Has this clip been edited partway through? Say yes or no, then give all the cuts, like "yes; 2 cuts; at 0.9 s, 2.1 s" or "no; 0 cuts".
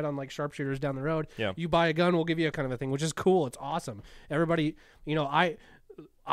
yes; 1 cut; at 2.5 s